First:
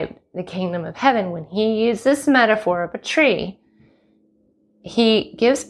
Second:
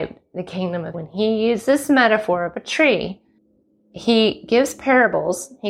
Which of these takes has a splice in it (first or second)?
second